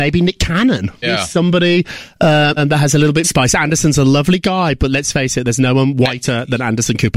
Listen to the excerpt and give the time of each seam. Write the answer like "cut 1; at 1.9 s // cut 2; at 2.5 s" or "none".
cut 1; at 1.0 s // cut 2; at 2.6 s // cut 3; at 3.2 s

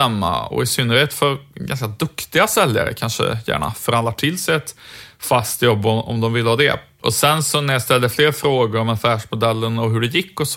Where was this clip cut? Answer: none

